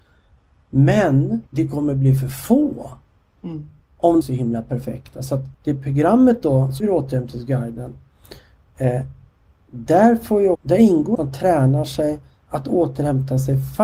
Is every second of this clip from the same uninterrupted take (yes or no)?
no